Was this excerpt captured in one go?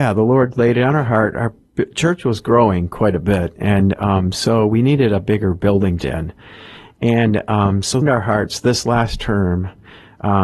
no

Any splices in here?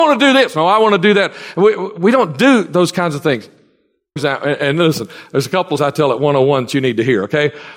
yes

